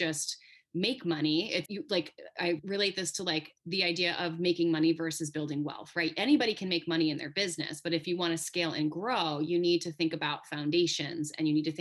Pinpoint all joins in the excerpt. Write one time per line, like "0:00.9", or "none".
0:01.7